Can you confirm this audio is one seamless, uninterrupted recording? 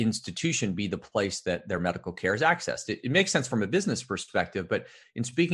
yes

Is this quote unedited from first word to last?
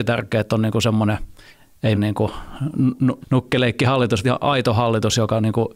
no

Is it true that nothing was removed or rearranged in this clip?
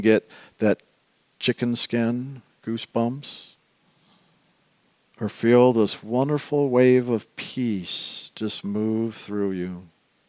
yes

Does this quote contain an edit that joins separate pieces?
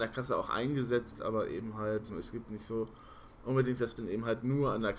yes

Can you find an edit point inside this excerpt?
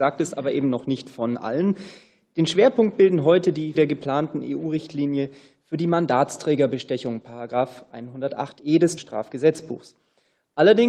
yes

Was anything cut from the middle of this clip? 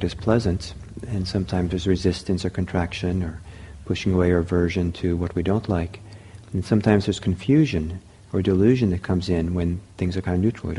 no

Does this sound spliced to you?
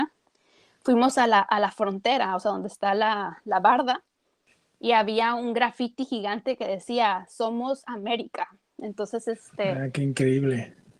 no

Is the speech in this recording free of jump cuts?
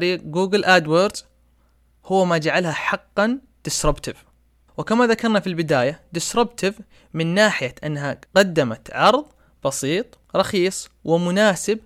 no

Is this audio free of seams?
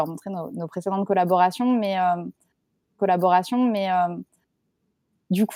no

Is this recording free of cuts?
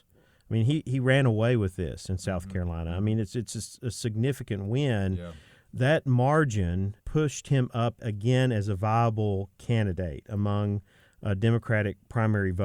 no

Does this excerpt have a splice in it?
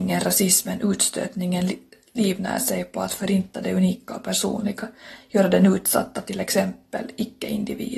no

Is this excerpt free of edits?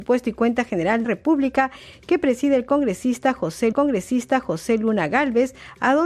no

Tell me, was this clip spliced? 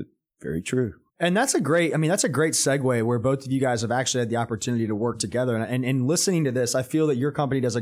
yes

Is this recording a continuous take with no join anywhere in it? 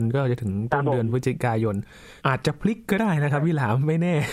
no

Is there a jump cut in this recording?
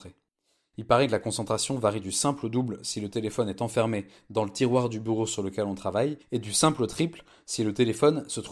yes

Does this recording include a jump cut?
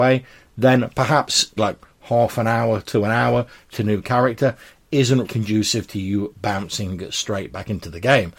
yes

